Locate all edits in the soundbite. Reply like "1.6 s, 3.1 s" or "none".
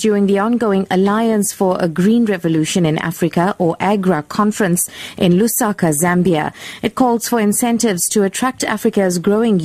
none

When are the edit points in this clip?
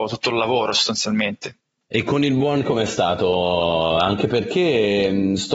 2.6 s

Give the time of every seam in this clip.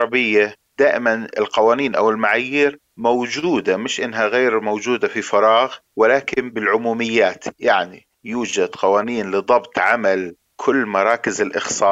8.1 s

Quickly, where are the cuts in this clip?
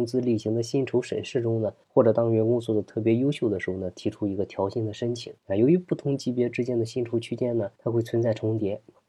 1.8 s, 5.4 s, 7.7 s

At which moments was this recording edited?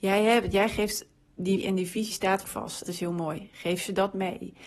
1.6 s, 2.1 s, 2.4 s, 2.9 s

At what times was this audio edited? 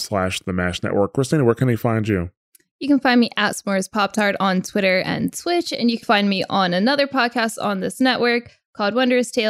6.0 s

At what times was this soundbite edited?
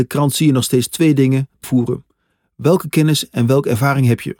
1.6 s

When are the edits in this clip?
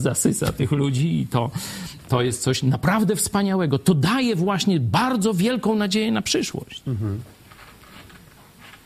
none

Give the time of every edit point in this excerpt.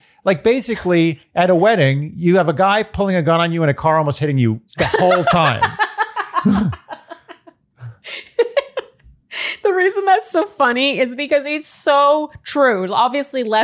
4.7 s

